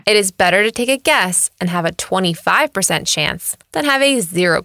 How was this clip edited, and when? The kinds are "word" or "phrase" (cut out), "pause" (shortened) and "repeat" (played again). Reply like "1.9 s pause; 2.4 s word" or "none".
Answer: none